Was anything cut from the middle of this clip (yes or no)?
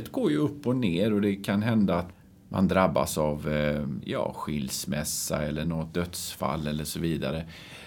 no